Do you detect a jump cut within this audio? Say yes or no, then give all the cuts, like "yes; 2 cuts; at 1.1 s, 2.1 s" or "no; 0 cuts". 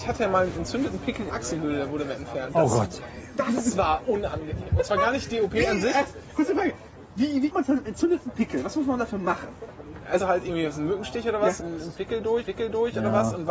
yes; 5 cuts; at 1.3 s, 7.5 s, 10.2 s, 11.6 s, 12.4 s